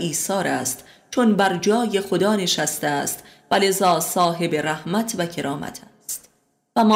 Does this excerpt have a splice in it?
no; 0 cuts

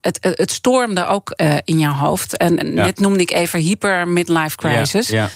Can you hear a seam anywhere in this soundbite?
no; 0 cuts

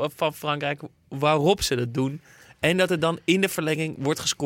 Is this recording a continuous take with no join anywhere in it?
yes; 0 cuts

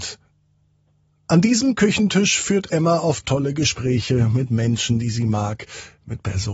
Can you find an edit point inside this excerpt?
no; 0 cuts

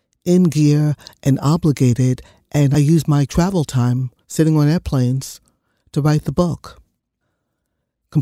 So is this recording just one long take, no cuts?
yes; 0 cuts

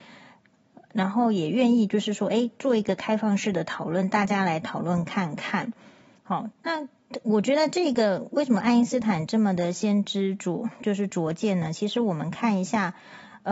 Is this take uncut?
no; 1 cut; at 6.5 s

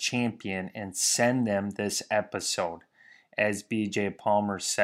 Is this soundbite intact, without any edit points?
yes; 0 cuts

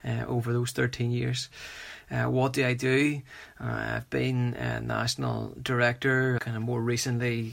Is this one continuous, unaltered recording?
no; 1 cut; at 6.4 s

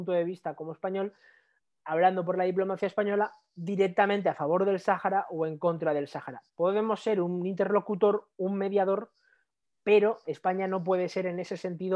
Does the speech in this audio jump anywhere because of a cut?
no; 0 cuts

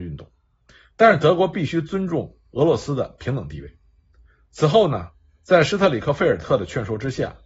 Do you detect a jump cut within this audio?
no; 0 cuts

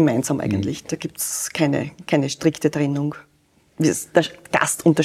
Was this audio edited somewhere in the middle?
no; 0 cuts

